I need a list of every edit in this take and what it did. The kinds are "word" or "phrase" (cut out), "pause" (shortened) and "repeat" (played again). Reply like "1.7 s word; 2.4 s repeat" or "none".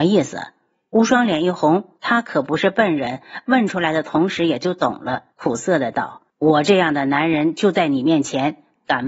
2.0 s pause; 5.3 s pause; 6.3 s pause